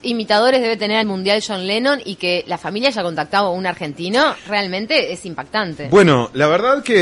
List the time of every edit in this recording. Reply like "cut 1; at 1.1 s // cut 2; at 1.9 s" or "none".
cut 1; at 1.0 s // cut 2; at 4.4 s